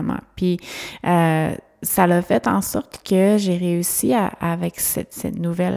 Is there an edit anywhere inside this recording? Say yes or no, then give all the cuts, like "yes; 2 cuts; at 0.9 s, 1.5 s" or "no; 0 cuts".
no; 0 cuts